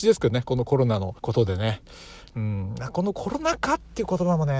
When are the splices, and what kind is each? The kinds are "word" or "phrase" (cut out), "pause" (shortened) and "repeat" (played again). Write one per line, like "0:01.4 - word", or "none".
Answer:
0:01.2 - pause